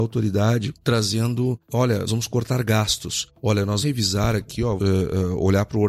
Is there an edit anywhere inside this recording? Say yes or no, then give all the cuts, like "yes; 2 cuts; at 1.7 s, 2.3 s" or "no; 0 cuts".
yes; 3 cuts; at 2.1 s, 3.8 s, 4.8 s